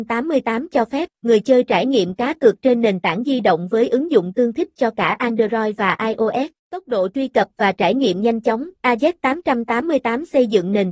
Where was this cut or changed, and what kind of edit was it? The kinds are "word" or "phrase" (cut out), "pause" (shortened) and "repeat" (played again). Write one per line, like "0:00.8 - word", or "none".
0:01.1 - pause
0:06.6 - pause
0:08.8 - pause